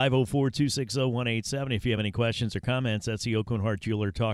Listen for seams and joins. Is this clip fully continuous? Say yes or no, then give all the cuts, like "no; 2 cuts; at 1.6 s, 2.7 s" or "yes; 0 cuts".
yes; 0 cuts